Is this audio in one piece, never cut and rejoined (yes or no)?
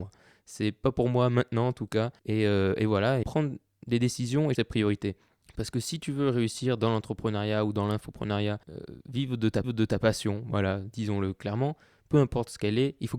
no